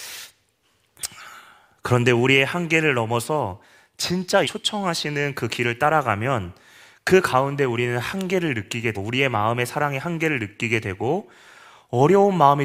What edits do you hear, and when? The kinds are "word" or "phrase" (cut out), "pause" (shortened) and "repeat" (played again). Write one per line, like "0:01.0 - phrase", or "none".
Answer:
0:04.4 - word
0:08.9 - word